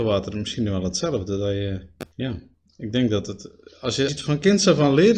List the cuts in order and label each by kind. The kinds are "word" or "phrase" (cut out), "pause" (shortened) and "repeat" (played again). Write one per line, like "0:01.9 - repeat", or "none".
0:02.1 - pause
0:04.1 - word